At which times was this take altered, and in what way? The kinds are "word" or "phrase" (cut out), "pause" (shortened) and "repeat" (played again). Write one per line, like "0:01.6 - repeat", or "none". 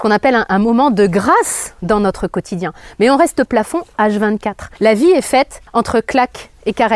0:03.4 - phrase
0:04.7 - pause
0:05.7 - word